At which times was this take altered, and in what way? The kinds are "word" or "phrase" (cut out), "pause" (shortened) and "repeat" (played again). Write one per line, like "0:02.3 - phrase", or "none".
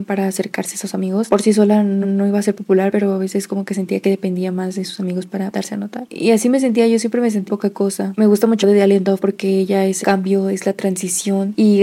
0:02.0 - repeat
0:07.5 - word
0:08.6 - word
0:10.0 - word